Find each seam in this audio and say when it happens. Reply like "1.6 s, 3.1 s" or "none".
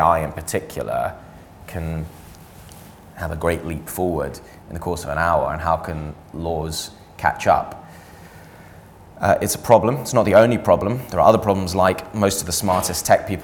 none